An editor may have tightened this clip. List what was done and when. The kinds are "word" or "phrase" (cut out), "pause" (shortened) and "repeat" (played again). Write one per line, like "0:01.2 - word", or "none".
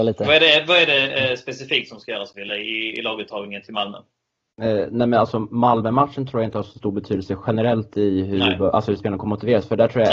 none